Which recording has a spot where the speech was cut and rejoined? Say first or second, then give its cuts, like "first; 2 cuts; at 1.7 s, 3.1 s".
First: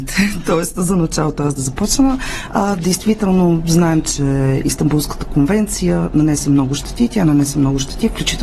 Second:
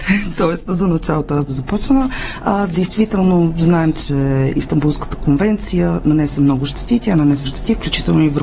second; 1 cut; at 7.4 s